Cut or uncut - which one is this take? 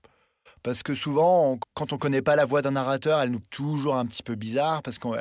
cut